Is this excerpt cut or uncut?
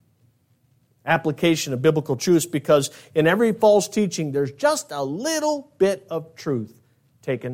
uncut